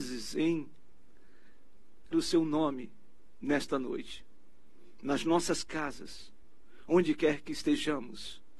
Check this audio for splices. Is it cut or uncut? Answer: cut